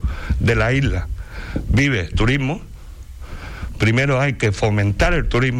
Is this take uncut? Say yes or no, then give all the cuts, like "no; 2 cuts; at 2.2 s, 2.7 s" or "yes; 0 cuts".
no; 1 cut; at 2.1 s